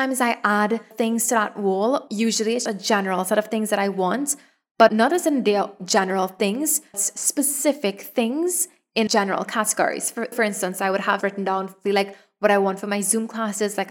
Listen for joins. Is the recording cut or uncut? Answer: cut